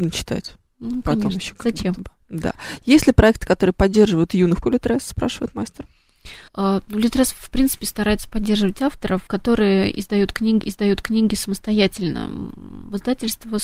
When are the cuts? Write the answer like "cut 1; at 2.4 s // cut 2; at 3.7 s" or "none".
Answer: cut 1; at 4.6 s // cut 2; at 6.5 s // cut 3; at 9.3 s // cut 4; at 10.6 s